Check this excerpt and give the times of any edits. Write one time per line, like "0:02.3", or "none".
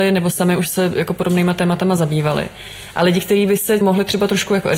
0:03.8